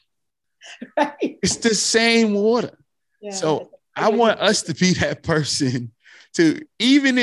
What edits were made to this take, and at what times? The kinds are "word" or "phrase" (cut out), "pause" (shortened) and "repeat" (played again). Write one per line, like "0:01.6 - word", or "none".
none

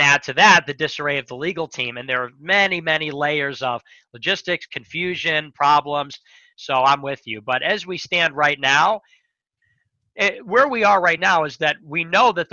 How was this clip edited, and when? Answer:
none

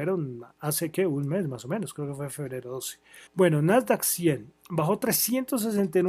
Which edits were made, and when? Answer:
0:03.3 - pause

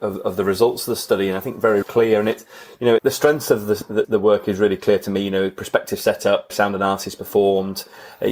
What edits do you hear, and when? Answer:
0:01.8 - word
0:03.0 - word
0:04.0 - word
0:06.5 - word

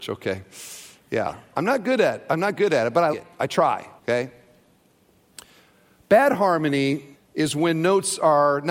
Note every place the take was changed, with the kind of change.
0:03.1 - word
0:04.0 - pause
0:07.1 - pause

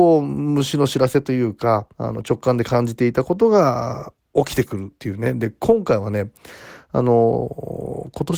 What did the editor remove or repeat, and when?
0:01.9 - pause
0:05.0 - pause

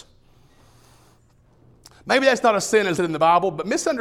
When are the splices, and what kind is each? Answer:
0:03.0 - word

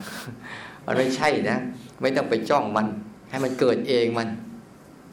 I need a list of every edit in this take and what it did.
none

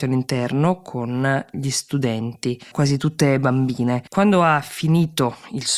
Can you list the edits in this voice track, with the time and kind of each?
0:02.7 - word
0:04.1 - pause

